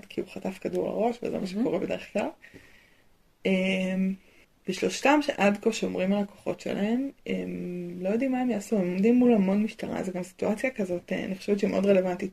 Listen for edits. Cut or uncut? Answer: cut